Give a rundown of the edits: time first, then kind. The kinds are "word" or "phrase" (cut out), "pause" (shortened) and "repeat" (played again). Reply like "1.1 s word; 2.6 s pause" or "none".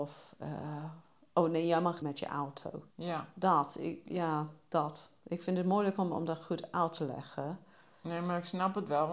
2.0 s word; 2.9 s pause